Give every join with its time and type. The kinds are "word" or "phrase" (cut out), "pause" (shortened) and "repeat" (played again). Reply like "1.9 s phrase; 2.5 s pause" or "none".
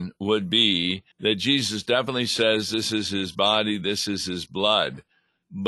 1.1 s pause